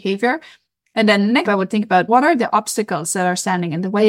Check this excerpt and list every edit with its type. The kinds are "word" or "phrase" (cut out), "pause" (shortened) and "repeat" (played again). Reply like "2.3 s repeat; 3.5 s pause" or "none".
1.5 s word; 2.1 s word

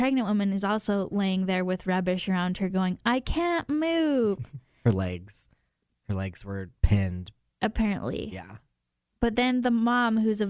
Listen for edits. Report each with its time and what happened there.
none

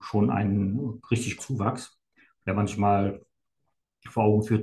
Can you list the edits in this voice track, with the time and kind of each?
1.4 s word

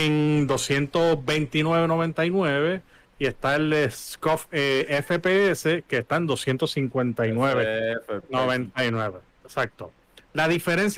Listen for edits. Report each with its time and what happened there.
none

